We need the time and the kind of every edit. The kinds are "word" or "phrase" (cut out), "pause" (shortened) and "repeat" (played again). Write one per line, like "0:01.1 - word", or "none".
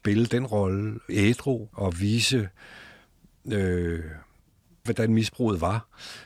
0:01.1 - word
0:01.7 - word
0:04.9 - word

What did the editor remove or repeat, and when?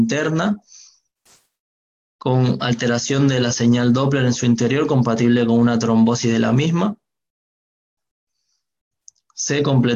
none

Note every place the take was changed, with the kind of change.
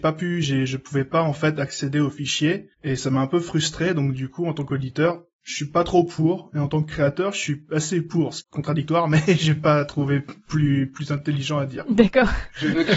0:02.7 - pause
0:08.4 - phrase

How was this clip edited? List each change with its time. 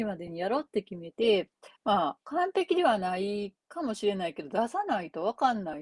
0:01.8 - pause
0:02.2 - pause
0:03.6 - pause

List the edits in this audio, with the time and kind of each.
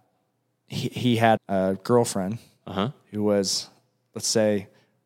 0:01.4 - word

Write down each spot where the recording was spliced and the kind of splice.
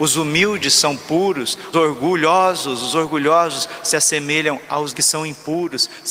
0:01.7 - word
0:04.9 - word

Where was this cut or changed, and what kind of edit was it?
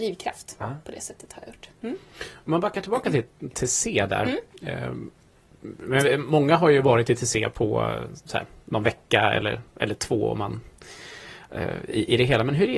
0:01.7 - pause

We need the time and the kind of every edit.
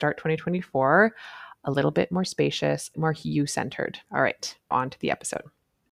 0:02.9 - phrase
0:04.0 - pause
0:04.7 - word

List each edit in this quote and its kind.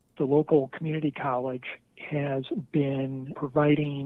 none

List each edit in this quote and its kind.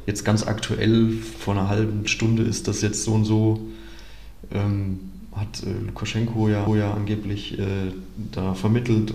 0:02.0 - word
0:06.7 - repeat

